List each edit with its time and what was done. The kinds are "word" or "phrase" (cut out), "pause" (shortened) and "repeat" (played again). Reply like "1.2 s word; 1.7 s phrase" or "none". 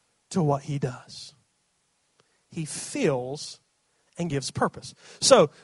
none